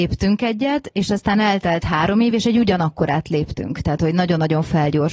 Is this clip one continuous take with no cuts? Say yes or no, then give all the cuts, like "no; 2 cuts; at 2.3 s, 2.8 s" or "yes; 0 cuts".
yes; 0 cuts